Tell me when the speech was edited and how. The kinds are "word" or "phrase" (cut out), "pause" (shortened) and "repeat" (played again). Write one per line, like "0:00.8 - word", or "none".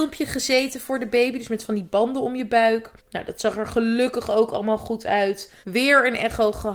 0:03.0 - pause
0:05.6 - pause